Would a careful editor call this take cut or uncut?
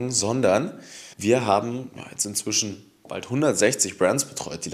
cut